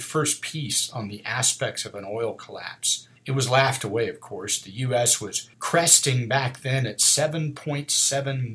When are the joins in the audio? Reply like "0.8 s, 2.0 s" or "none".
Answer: 3.2 s, 5.5 s